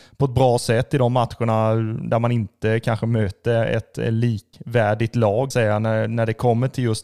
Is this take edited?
yes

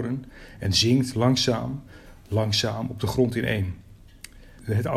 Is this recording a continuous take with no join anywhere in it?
yes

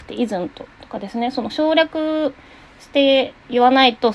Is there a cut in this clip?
no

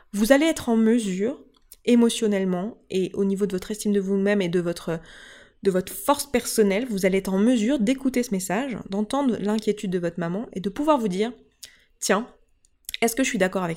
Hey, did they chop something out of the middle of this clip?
no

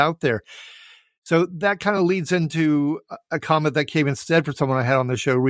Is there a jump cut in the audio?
no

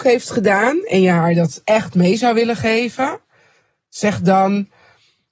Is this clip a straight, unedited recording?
yes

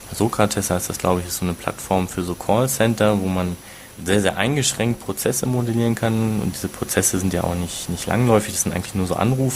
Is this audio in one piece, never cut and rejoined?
no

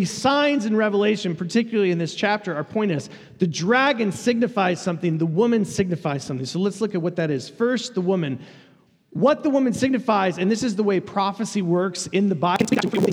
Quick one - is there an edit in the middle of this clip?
no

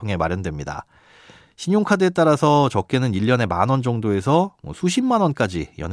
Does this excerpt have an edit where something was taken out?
no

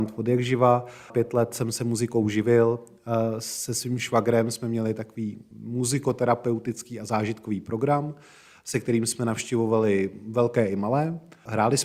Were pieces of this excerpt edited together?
no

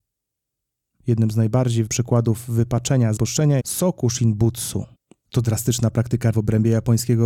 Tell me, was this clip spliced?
yes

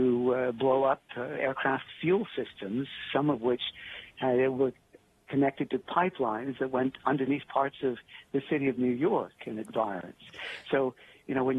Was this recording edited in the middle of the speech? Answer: no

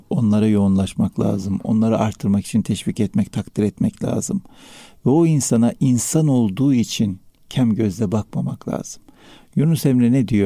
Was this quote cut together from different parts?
no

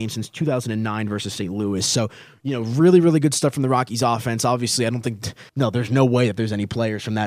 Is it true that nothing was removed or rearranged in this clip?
no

